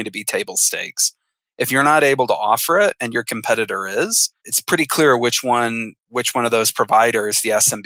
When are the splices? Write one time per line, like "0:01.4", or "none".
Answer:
none